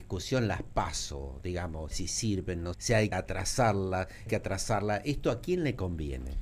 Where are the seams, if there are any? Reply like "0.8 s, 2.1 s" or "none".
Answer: 1.9 s, 2.7 s, 3.1 s, 4.3 s